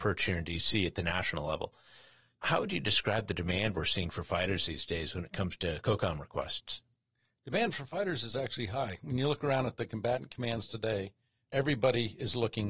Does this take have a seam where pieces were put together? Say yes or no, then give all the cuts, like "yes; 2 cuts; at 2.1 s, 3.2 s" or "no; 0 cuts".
no; 0 cuts